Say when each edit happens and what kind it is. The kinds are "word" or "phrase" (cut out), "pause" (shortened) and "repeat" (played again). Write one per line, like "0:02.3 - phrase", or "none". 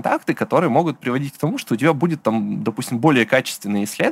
none